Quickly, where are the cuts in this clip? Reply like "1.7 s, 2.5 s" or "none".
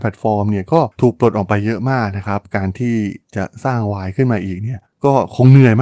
0.9 s